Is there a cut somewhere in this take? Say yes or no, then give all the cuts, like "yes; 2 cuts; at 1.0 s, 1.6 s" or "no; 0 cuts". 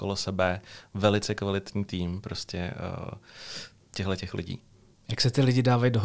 no; 0 cuts